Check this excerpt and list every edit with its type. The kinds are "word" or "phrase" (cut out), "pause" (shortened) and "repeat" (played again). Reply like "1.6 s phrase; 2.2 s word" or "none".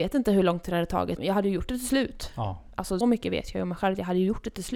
1.2 s word; 3.0 s word